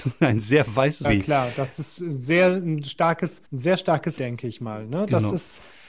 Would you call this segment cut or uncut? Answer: cut